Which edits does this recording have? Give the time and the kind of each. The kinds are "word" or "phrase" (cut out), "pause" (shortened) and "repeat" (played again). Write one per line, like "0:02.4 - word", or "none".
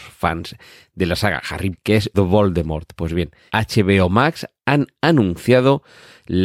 0:01.7 - word
0:02.1 - word
0:03.5 - word